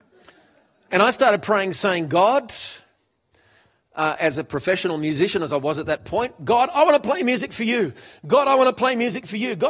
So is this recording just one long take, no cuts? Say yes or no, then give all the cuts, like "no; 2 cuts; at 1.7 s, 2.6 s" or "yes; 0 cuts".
yes; 0 cuts